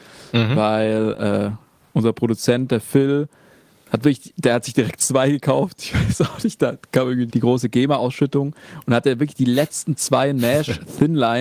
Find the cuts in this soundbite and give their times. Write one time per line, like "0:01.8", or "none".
0:07.3